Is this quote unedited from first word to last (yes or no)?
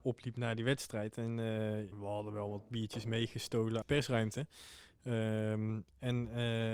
no